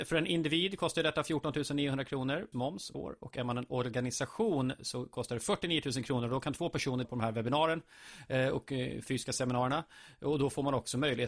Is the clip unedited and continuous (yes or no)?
no